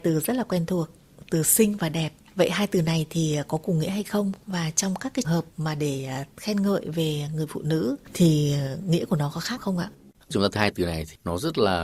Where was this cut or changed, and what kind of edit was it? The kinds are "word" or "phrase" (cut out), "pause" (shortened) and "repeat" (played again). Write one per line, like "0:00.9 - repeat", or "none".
0:05.2 - word
0:09.6 - word
0:10.6 - word